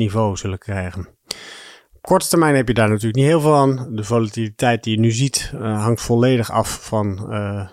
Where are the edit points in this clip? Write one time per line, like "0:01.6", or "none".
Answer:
none